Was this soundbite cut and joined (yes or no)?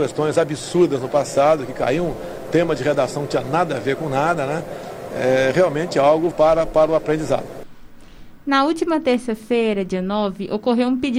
yes